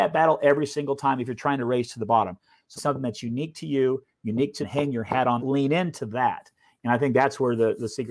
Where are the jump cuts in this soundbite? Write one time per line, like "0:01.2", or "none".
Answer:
0:02.8
0:04.6
0:05.4